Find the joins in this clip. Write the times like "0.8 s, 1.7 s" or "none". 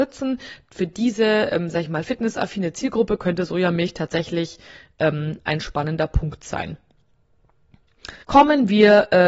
8.2 s